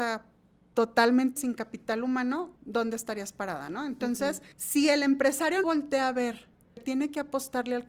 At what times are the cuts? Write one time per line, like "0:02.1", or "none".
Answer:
0:01.4
0:02.6
0:04.5
0:05.6
0:06.8